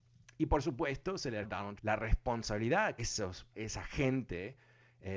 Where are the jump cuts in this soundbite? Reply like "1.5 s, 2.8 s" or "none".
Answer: 1.4 s, 1.8 s, 3.0 s, 3.5 s